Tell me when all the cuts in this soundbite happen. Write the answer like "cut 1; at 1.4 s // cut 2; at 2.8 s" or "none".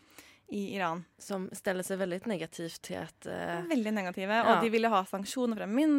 cut 1; at 1.1 s